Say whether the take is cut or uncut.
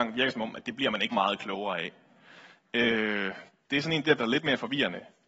cut